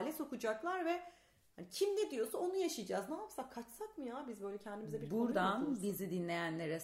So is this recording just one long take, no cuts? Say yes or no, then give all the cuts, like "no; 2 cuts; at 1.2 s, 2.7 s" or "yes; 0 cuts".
yes; 0 cuts